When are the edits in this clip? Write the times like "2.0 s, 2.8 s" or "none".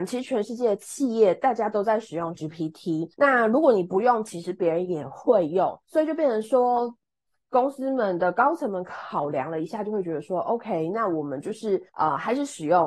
2.3 s, 3.1 s, 5.8 s, 11.9 s